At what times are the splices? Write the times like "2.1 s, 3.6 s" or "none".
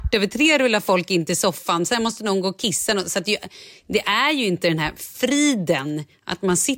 none